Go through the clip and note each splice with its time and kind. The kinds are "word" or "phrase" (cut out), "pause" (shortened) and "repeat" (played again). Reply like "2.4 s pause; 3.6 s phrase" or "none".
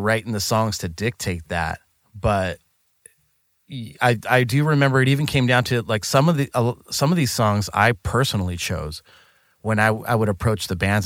none